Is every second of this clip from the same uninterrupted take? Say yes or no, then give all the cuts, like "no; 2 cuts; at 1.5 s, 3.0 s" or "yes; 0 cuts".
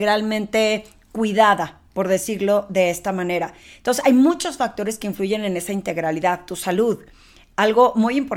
yes; 0 cuts